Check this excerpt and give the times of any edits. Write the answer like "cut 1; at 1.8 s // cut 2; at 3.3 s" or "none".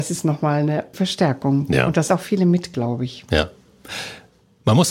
cut 1; at 0.9 s // cut 2; at 2.1 s